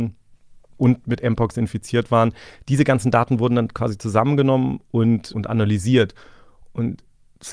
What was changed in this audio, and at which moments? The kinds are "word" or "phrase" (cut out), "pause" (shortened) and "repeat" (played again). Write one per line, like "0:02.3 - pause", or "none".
0:05.3 - word